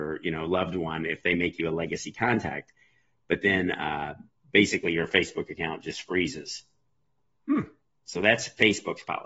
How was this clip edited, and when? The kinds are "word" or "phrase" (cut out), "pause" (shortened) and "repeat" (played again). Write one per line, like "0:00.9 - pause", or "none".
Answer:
none